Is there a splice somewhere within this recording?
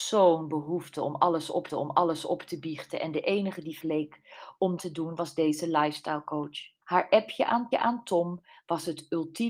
yes; 5 cuts; at 1.7 s, 3.8 s, 4.8 s, 6.8 s, 7.7 s

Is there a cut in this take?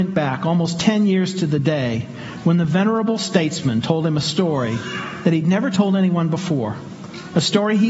no; 0 cuts

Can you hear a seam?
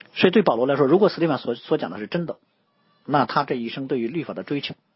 no; 0 cuts

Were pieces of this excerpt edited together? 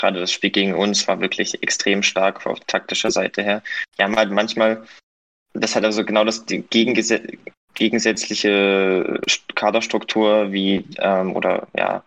no; 0 cuts

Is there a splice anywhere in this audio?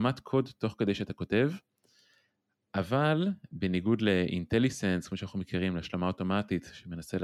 no; 0 cuts

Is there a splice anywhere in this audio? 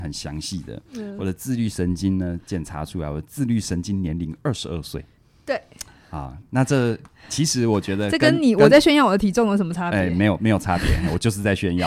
no; 0 cuts

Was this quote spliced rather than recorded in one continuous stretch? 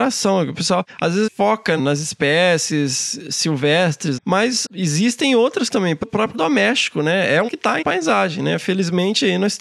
yes; 9 cuts; at 1.3 s, 1.8 s, 4.2 s, 4.7 s, 5.7 s, 6.0 s, 6.3 s, 7.5 s, 7.8 s

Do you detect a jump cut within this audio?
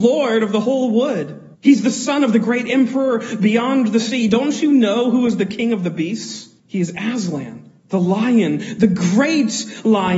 yes; 3 cuts; at 1.5 s, 6.6 s, 7.8 s

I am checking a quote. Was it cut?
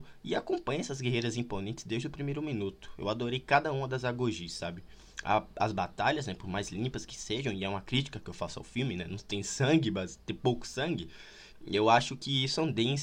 no; 0 cuts

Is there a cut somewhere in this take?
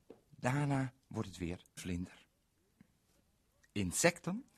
yes; 1 cut; at 1.8 s

